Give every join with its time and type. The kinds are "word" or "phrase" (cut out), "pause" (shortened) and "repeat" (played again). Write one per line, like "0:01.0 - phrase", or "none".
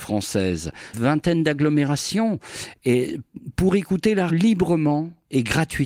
0:00.9 - phrase
0:04.3 - word